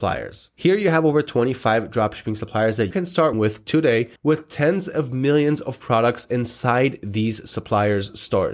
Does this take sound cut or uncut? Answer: cut